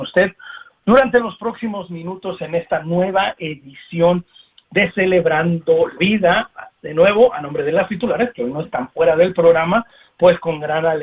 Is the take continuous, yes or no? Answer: no